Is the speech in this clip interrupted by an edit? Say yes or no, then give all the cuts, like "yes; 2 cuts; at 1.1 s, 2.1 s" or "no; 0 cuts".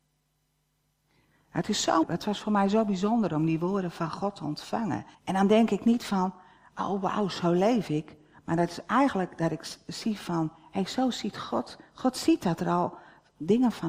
yes; 2 cuts; at 2.0 s, 5.1 s